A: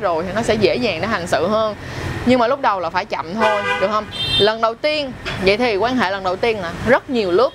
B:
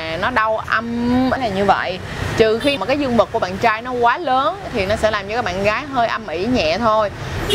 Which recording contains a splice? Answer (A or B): B